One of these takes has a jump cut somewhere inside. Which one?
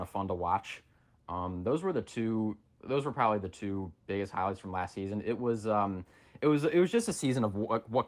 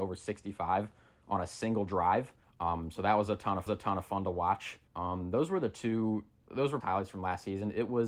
second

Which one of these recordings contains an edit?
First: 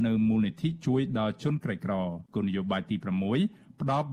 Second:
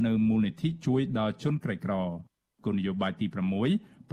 first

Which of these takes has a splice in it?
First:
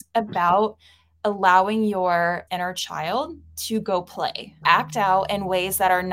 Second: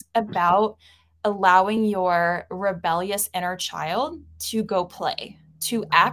first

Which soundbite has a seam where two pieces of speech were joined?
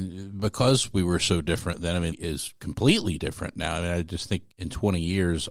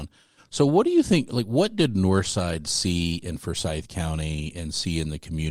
first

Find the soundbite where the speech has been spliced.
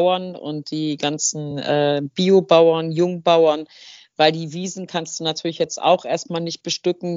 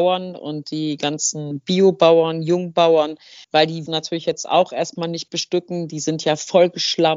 second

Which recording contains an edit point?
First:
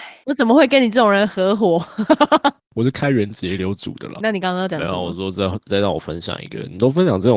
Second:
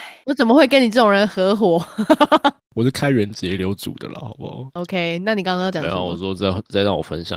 first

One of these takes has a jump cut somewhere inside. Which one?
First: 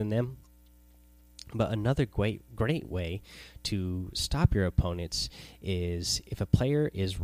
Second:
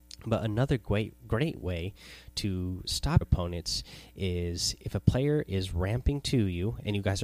second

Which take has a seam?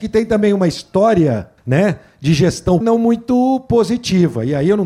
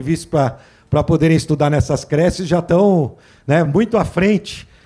first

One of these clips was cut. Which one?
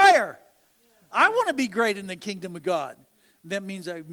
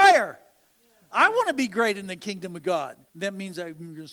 second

